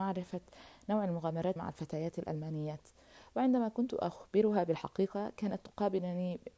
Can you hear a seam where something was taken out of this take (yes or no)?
yes